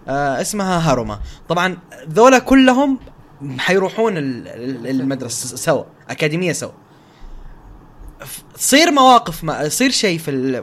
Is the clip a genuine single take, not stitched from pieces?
yes; 0 cuts

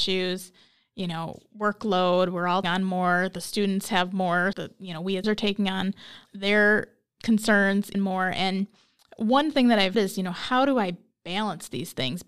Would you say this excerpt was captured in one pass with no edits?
no; 6 cuts; at 2.6 s, 4.5 s, 5.2 s, 6.2 s, 7.9 s, 9.9 s

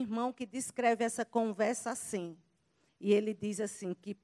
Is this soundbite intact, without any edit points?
yes; 0 cuts

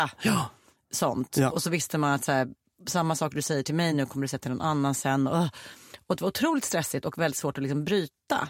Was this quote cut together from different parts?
no; 0 cuts

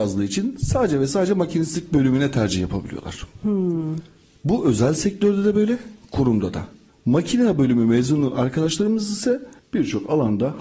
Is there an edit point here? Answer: no; 0 cuts

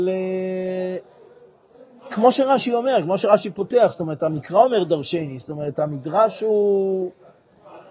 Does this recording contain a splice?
no; 0 cuts

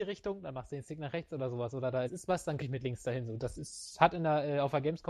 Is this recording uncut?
no; 3 cuts; at 2.1 s, 2.6 s, 3.5 s

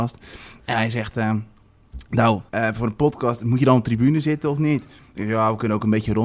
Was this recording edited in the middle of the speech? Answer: yes; 1 cut; at 2.5 s

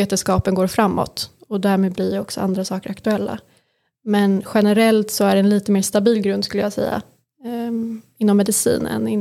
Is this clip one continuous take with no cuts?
yes; 0 cuts

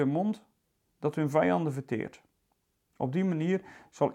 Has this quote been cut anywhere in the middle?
no; 0 cuts

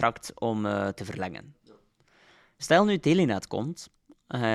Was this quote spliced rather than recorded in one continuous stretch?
no; 0 cuts

